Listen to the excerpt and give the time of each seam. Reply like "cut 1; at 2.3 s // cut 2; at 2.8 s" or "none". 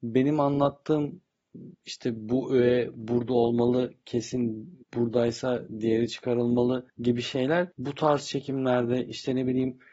cut 1; at 4.8 s // cut 2; at 6.9 s // cut 3; at 7.7 s